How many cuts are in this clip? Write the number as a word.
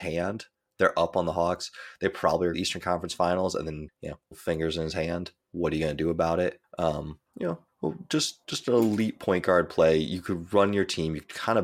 three